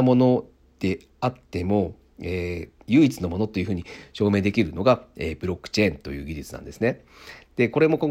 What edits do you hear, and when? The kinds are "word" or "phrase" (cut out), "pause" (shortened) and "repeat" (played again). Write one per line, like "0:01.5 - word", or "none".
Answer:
0:02.8 - pause